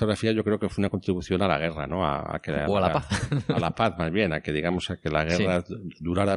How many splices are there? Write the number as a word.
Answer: zero